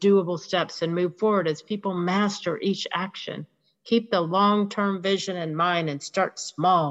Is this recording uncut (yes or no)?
yes